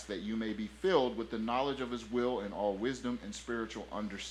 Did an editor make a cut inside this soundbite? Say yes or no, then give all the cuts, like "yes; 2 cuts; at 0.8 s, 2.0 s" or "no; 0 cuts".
no; 0 cuts